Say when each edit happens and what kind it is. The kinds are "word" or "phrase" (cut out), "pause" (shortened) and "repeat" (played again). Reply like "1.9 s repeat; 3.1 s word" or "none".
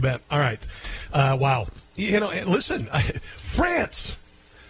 none